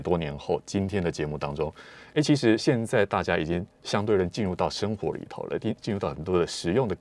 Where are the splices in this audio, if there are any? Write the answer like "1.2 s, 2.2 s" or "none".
none